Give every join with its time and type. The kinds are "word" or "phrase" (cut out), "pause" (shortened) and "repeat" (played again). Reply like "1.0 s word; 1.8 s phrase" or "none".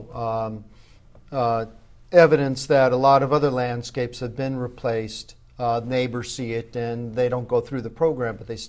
none